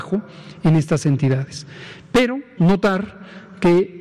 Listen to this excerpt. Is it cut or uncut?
cut